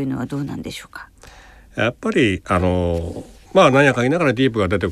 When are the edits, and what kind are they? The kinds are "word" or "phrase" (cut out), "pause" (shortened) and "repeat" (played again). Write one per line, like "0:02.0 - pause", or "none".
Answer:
0:03.5 - pause